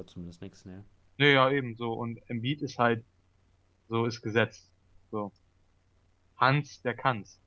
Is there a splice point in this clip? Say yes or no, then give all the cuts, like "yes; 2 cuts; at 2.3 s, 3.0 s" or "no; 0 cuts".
no; 0 cuts